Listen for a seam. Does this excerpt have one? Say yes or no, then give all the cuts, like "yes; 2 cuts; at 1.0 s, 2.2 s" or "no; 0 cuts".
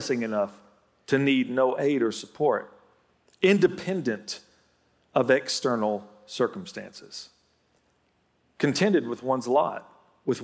no; 0 cuts